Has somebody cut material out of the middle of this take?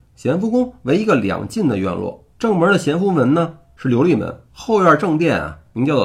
yes; 2 cuts; at 2.3 s, 4.5 s

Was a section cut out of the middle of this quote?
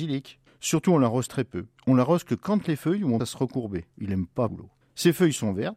yes; 3 cuts; at 1.3 s, 3.2 s, 4.5 s

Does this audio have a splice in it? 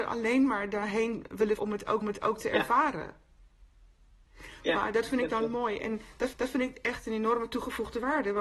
yes; 3 cuts; at 1.6 s, 2.0 s, 6.3 s

